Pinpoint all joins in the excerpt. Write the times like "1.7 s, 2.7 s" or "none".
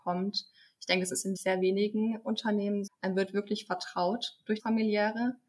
1.4 s, 2.9 s, 4.6 s